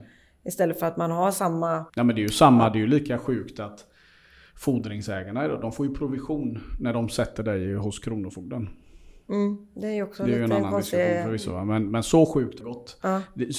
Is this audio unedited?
no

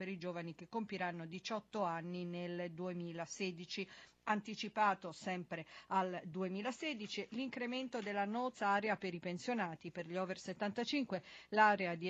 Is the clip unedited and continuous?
no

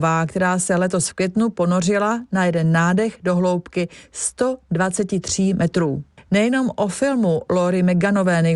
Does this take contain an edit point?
no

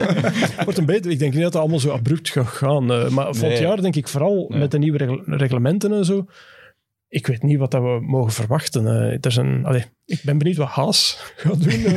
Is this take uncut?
yes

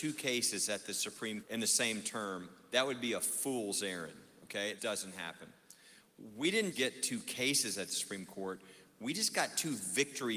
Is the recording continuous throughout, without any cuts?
no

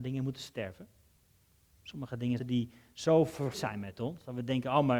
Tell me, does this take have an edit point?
yes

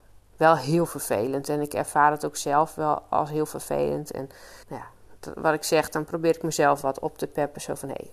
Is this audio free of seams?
no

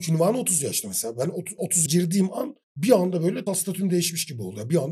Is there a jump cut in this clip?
yes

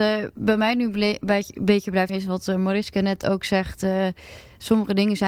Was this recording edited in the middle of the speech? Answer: yes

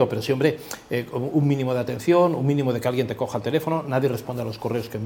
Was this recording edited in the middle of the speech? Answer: no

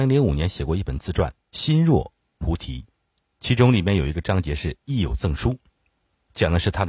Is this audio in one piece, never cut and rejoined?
no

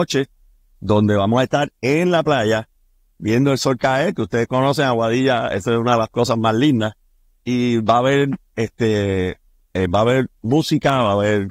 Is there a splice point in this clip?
no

